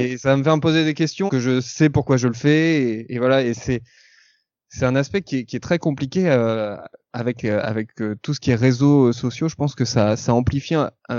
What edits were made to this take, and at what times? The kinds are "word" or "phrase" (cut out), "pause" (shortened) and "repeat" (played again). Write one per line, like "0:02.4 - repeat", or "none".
0:01.3 - word